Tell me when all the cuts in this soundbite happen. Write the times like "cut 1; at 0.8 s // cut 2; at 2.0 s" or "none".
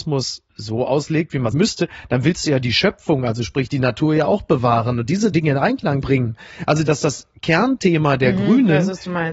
cut 1; at 1.5 s // cut 2; at 5.3 s // cut 3; at 6.0 s